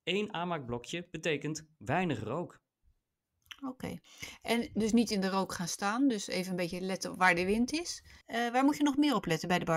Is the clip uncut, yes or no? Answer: no